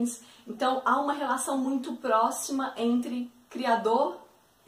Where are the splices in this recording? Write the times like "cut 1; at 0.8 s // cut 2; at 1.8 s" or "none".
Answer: none